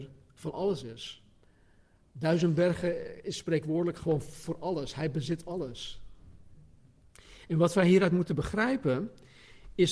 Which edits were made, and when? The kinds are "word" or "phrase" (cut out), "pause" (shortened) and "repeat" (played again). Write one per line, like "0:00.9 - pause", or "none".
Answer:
none